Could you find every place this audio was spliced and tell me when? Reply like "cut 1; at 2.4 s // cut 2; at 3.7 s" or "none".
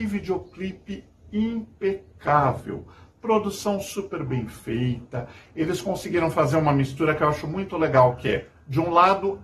none